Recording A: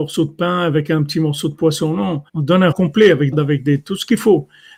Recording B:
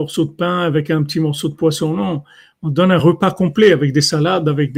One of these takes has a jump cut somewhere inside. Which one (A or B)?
A